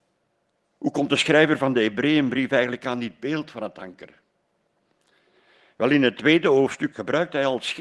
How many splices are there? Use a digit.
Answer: 1